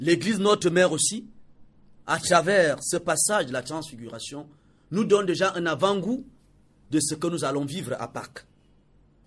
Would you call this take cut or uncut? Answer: uncut